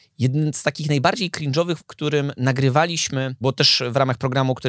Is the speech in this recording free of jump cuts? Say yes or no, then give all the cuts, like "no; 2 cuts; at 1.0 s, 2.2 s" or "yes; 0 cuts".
no; 2 cuts; at 1.8 s, 3.4 s